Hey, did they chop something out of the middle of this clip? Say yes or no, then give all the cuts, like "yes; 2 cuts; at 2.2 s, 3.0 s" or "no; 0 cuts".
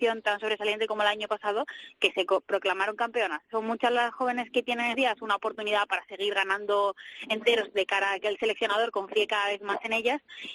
yes; 1 cut; at 4.9 s